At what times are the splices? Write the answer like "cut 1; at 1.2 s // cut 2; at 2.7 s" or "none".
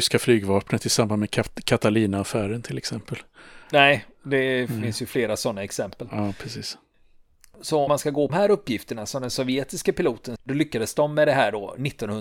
cut 1; at 3.6 s // cut 2; at 7.9 s // cut 3; at 8.3 s // cut 4; at 10.4 s